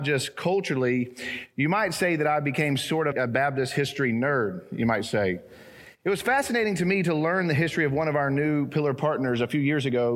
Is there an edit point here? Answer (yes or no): yes